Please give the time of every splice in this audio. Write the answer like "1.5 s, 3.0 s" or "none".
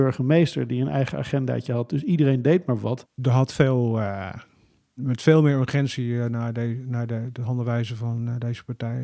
none